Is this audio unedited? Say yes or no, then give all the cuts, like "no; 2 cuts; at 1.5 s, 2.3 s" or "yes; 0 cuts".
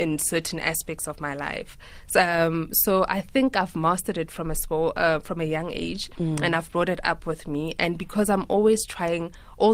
yes; 0 cuts